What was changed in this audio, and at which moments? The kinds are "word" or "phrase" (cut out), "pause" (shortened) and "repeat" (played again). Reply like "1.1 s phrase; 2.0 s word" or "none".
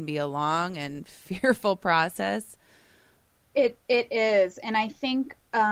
none